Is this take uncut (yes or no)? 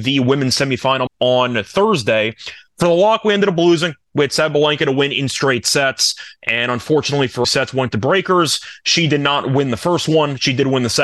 no